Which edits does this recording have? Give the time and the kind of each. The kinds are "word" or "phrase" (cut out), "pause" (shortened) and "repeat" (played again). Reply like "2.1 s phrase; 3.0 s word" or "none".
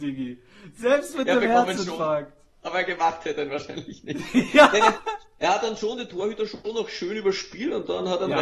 none

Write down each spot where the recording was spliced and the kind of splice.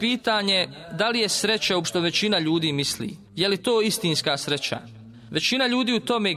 1.8 s phrase; 3.3 s pause

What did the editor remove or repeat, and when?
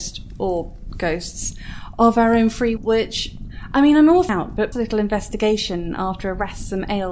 2.8 s word; 4.3 s word; 4.7 s word

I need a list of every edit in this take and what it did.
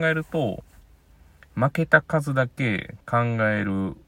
3.0 s pause

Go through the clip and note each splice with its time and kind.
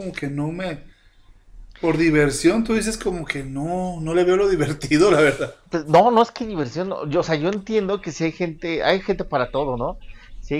none

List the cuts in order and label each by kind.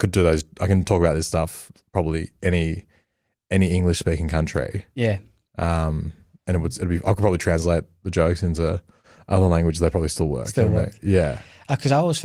none

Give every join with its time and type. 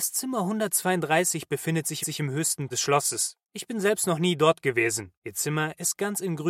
2.0 s repeat; 2.7 s word; 5.2 s pause

